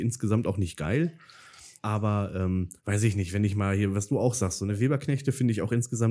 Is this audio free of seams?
no; 2 cuts; at 1.8 s, 2.8 s

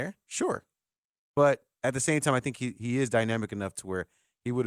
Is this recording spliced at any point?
no; 0 cuts

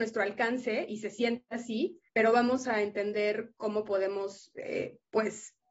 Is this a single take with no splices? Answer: no; 1 cut; at 2.1 s

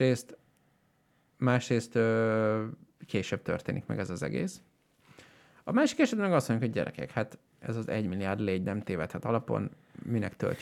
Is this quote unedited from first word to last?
yes; 0 cuts

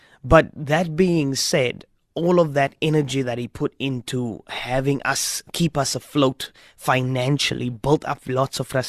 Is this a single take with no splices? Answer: yes; 0 cuts

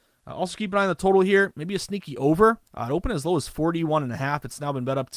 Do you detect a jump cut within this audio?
yes; 1 cut; at 2.6 s

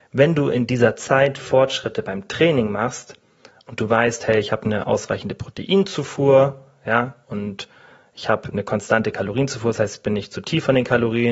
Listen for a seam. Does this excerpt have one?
no; 0 cuts

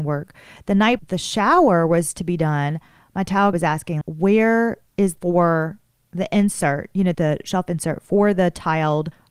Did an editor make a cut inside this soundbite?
yes; 5 cuts; at 1.0 s, 3.5 s, 4.0 s, 5.2 s, 7.1 s

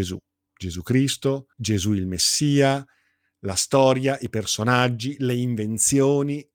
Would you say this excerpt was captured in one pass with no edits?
no; 1 cut; at 1.5 s

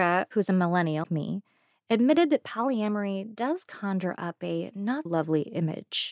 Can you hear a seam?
yes; 2 cuts; at 1.0 s, 5.1 s

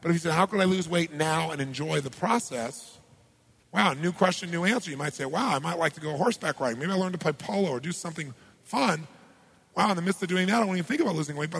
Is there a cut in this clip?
no; 0 cuts

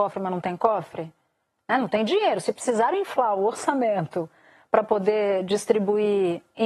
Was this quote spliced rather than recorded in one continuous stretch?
no; 0 cuts

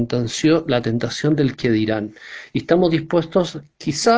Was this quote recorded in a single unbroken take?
yes; 0 cuts

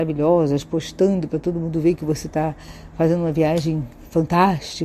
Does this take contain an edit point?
no; 0 cuts

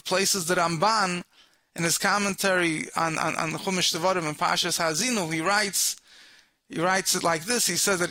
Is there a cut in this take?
no; 0 cuts

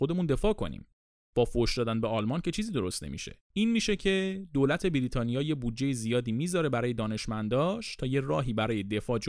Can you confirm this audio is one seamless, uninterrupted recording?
no; 1 cut; at 3.4 s

